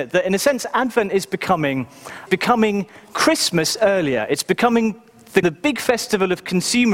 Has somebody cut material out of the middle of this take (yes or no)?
yes